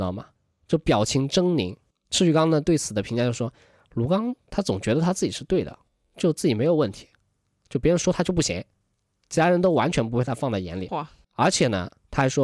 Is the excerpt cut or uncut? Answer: uncut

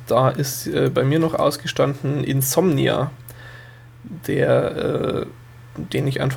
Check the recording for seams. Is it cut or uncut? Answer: uncut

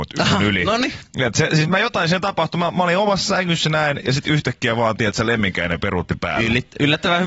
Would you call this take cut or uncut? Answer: cut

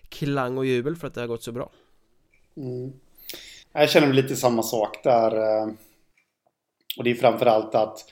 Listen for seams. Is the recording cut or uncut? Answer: cut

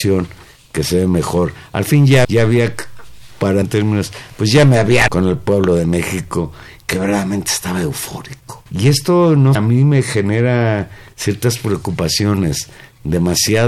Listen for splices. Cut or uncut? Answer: cut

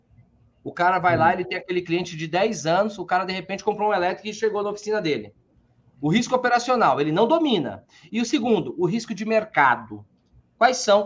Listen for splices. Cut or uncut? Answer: uncut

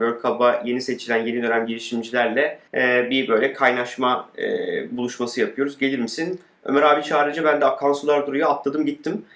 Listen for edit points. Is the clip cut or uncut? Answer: cut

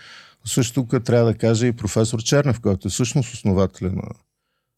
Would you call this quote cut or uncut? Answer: uncut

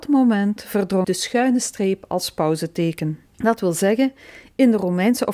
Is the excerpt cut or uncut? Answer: cut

